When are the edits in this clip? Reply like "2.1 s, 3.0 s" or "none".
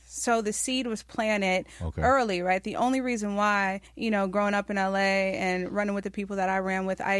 3.9 s